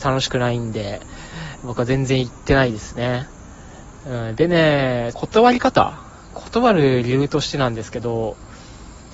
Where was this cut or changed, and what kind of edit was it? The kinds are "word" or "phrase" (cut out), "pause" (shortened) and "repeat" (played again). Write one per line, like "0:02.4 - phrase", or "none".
0:05.1 - phrase